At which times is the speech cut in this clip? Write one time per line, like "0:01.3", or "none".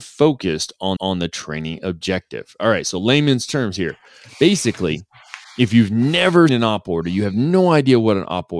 0:01.0
0:06.5